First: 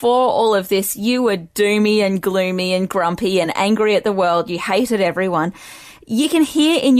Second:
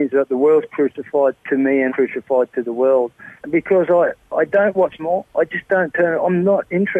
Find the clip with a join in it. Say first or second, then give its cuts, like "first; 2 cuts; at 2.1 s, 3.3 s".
second; 3 cuts; at 1.9 s, 3.4 s, 5.0 s